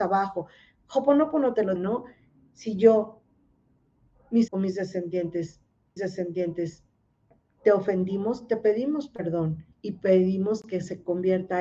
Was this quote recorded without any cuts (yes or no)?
no